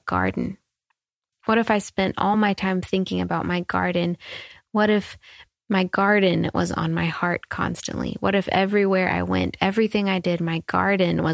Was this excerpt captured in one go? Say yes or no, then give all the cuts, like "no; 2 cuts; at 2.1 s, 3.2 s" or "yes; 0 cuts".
yes; 0 cuts